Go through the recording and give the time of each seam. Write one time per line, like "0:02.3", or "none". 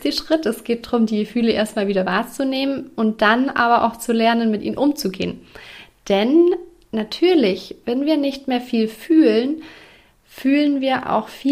none